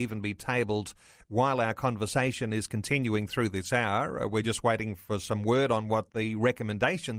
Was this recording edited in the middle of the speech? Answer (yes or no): no